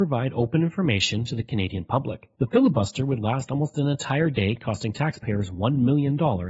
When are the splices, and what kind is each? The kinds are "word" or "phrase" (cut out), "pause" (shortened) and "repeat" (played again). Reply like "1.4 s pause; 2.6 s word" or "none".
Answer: 2.3 s pause